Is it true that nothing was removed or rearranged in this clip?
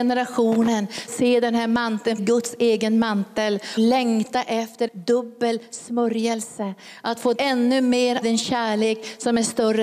no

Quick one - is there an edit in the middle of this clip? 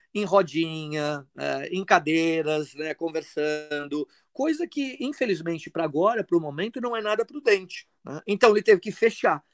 no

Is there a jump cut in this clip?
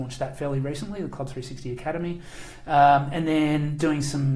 no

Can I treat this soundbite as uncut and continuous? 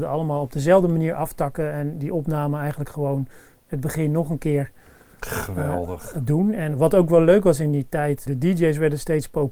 yes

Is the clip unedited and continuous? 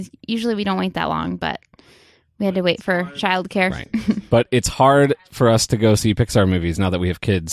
yes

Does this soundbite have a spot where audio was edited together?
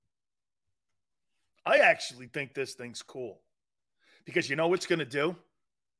no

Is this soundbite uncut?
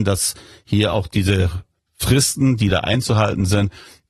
yes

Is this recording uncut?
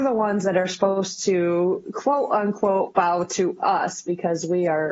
yes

